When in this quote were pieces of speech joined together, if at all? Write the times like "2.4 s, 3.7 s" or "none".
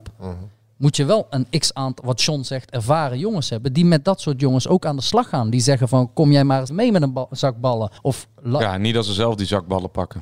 6.7 s, 8.0 s

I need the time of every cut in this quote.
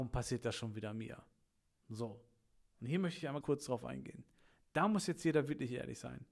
3.4 s

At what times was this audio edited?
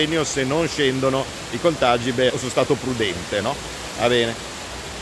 2.3 s

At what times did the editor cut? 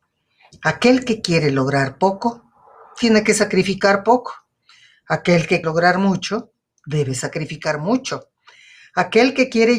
5.6 s

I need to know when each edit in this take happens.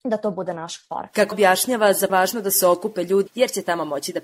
1.3 s, 2.1 s, 3.3 s

